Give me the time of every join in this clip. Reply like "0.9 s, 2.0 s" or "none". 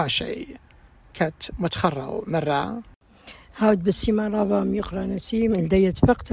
none